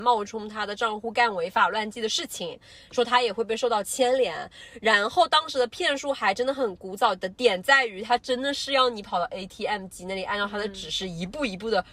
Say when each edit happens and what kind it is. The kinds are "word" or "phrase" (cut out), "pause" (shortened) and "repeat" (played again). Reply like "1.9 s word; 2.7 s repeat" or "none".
none